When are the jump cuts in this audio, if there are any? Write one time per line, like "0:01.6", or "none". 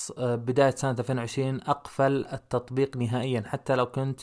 none